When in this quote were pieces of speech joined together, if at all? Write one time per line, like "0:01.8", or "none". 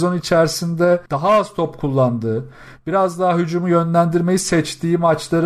0:01.1